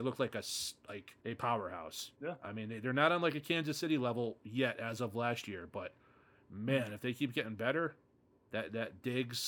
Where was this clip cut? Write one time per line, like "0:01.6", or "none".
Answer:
0:01.2
0:02.1